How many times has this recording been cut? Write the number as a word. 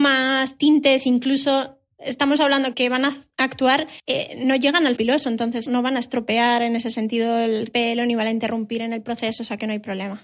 five